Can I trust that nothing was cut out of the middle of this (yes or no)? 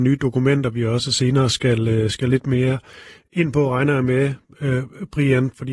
yes